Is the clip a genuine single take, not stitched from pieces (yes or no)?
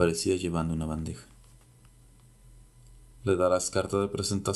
yes